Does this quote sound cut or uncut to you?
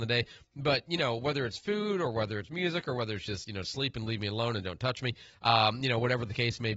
uncut